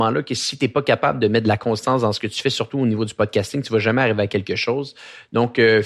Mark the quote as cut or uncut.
uncut